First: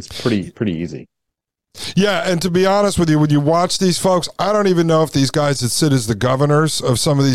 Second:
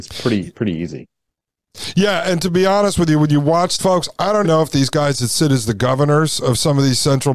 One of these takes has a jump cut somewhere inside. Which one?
second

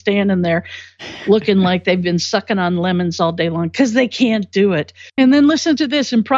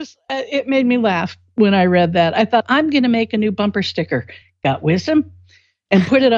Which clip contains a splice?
first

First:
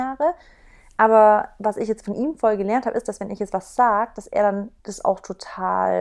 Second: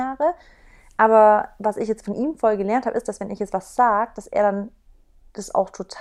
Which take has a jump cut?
first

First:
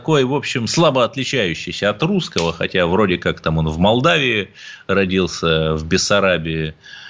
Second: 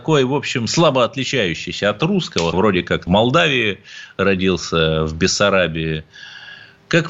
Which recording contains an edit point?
second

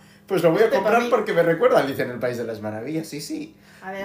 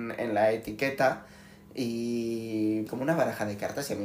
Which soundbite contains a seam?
second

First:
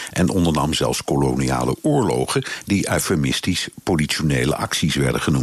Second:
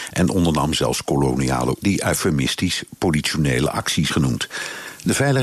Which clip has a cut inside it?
second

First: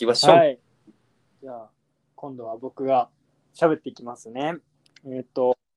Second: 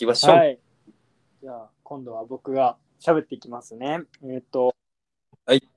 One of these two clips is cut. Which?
second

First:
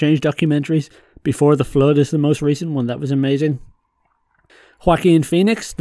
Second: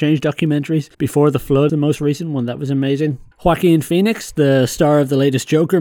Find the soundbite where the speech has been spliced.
second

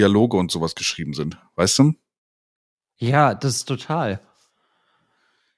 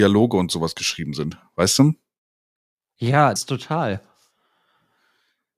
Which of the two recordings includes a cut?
second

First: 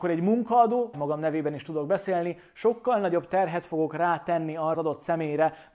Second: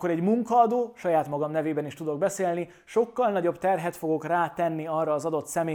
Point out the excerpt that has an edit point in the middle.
first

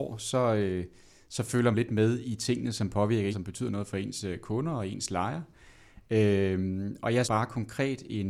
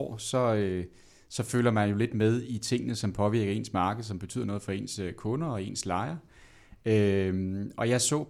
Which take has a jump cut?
first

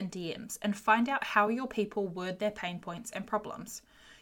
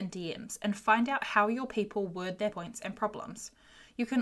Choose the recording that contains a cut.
second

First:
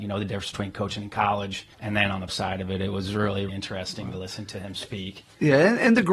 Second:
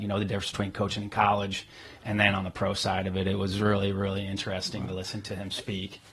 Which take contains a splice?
first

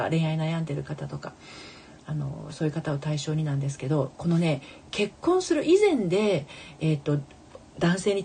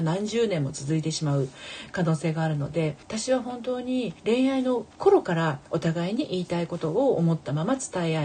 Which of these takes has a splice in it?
second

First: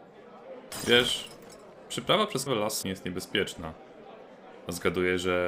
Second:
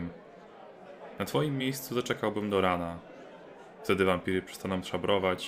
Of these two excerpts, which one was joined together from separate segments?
first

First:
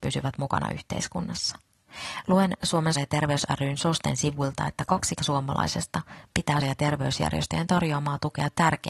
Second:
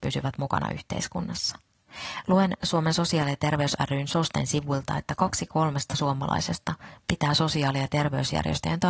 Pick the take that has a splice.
first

